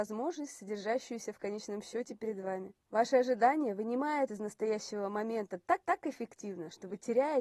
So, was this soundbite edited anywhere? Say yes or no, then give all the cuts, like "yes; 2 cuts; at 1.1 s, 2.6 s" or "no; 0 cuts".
yes; 3 cuts; at 2.8 s, 4.3 s, 5.8 s